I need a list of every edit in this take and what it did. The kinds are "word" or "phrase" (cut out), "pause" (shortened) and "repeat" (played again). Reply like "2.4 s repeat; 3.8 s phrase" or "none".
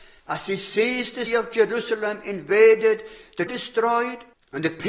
1.3 s word; 3.5 s word